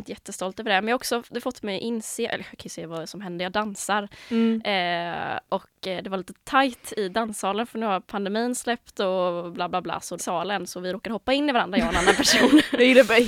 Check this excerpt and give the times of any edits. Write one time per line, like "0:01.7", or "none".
0:10.2